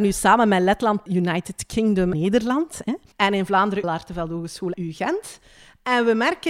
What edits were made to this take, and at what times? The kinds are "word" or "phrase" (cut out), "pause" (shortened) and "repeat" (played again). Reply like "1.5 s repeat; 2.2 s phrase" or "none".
1.1 s phrase; 2.1 s word; 3.1 s pause; 3.8 s word; 4.7 s word